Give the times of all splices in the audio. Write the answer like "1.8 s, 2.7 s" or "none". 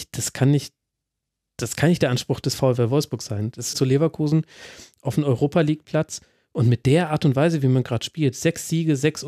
3.7 s